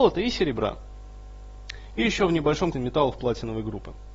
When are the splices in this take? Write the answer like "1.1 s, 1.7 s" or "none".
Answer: 2.7 s